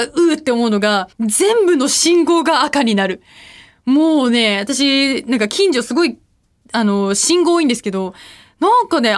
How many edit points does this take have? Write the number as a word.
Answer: one